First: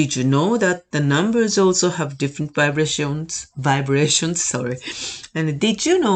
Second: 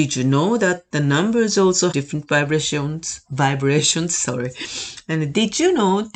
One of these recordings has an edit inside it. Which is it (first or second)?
second